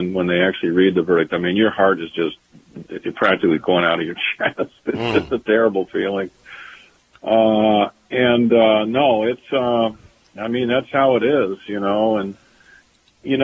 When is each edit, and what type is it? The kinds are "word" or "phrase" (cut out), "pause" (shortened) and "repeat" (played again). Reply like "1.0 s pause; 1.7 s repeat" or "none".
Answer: none